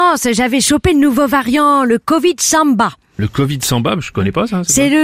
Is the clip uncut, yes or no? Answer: yes